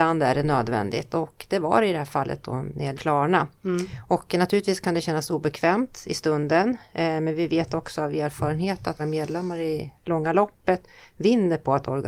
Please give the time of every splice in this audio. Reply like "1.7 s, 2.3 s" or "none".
2.9 s, 9.0 s